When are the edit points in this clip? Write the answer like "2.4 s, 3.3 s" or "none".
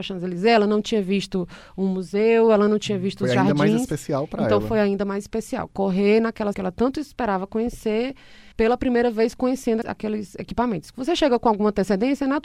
6.5 s, 8.5 s, 9.8 s